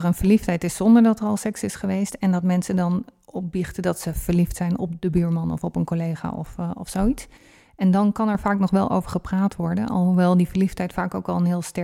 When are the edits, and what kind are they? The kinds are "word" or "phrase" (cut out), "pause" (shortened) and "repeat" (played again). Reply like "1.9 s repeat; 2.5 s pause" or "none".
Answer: none